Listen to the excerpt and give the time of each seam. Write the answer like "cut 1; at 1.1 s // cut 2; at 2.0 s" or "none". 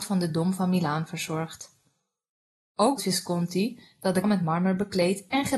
cut 1; at 3.0 s // cut 2; at 4.2 s